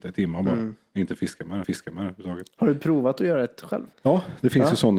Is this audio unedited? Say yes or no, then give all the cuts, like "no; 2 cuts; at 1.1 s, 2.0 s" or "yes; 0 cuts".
no; 2 cuts; at 1.6 s, 3.9 s